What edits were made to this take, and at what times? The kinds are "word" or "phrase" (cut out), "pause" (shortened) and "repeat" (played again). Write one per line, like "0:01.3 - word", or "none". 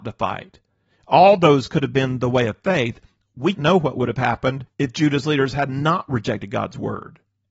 0:03.5 - word
0:04.7 - pause